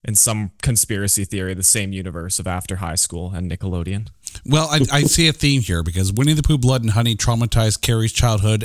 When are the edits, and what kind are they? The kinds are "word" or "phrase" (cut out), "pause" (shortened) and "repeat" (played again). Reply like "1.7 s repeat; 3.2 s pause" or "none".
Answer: none

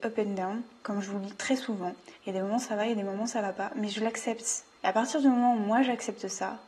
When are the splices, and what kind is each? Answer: 2.1 s pause; 4.7 s pause

